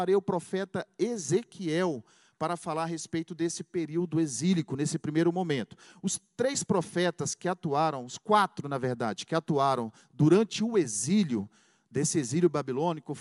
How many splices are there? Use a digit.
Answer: 0